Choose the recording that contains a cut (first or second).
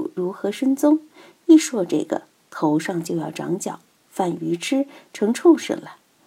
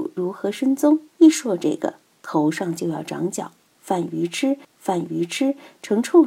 second